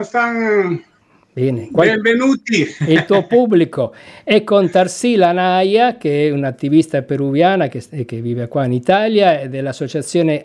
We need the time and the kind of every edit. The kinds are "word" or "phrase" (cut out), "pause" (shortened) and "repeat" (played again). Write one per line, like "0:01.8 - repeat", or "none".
none